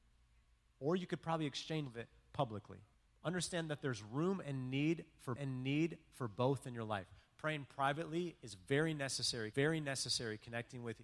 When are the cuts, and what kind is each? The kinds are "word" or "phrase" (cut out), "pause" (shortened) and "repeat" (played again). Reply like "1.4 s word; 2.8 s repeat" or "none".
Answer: 1.9 s word; 2.9 s pause; 5.4 s repeat; 9.5 s repeat